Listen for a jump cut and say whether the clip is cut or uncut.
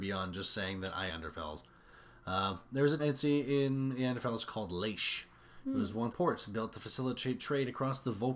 cut